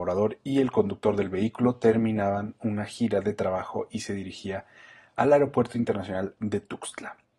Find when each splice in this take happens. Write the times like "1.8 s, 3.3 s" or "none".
none